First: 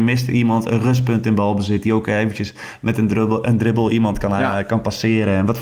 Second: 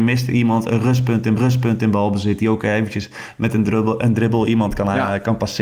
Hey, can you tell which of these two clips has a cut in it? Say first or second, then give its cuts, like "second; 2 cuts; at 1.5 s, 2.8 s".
second; 1 cut; at 1.4 s